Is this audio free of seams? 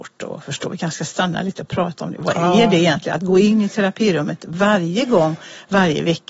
yes; 0 cuts

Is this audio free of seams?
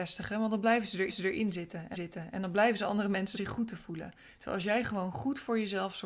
no; 3 cuts; at 1.1 s, 1.9 s, 3.3 s

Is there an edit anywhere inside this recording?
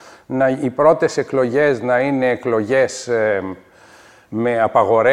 no; 0 cuts

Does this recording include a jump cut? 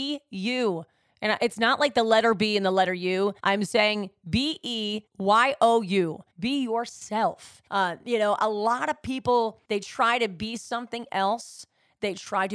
yes; 5 cuts; at 3.4 s, 5.1 s, 6.3 s, 7.7 s, 9.6 s

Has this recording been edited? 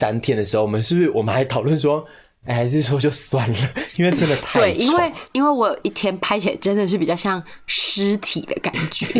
no; 0 cuts

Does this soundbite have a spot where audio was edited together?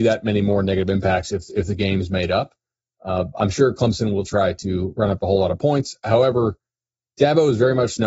no; 0 cuts

